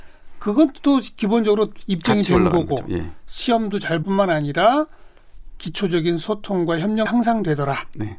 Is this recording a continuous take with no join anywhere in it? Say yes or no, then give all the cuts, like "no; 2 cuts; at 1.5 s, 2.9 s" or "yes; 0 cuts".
no; 2 cuts; at 4.0 s, 7.1 s